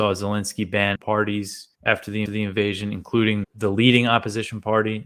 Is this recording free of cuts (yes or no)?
no